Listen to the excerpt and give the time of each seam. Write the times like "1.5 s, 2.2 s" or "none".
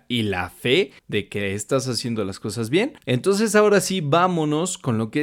1.0 s, 3.0 s